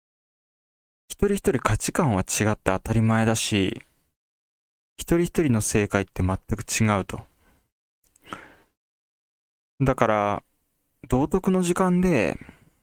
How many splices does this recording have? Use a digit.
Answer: 0